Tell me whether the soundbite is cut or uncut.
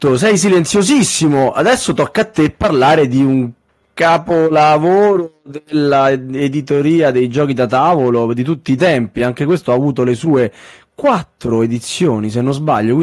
uncut